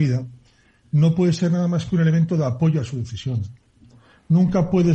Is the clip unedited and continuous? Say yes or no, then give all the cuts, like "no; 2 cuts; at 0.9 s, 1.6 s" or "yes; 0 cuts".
yes; 0 cuts